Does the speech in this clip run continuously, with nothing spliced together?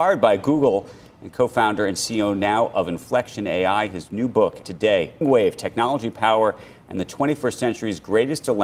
no; 2 cuts; at 4.6 s, 5.2 s

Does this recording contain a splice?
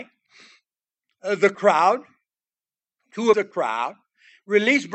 yes; 1 cut; at 3.3 s

